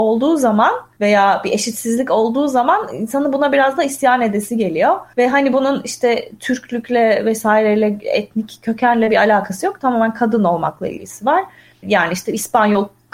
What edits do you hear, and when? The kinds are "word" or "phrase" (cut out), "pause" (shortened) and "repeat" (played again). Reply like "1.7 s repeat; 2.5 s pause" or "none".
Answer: none